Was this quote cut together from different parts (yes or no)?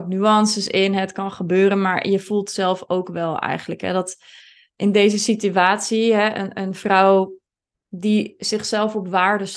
no